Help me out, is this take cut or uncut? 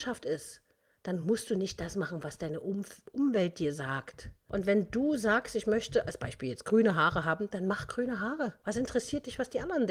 uncut